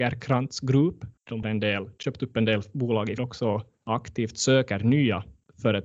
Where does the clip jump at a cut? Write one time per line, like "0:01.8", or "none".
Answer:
0:01.4
0:03.2